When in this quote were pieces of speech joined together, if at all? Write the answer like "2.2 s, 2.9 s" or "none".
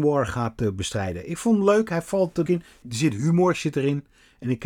2.5 s, 2.8 s